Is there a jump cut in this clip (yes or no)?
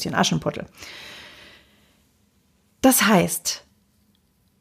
no